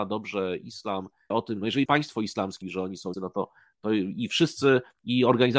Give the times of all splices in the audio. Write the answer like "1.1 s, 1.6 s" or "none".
1.3 s, 1.9 s, 2.6 s, 3.1 s